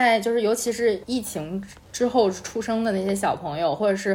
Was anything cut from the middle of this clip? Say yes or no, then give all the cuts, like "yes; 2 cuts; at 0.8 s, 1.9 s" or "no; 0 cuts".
yes; 1 cut; at 1.0 s